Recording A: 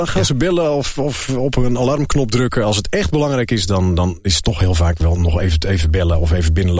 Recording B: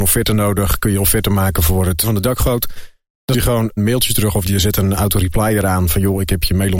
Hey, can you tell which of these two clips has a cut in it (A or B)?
B